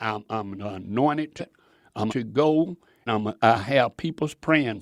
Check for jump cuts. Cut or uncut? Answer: cut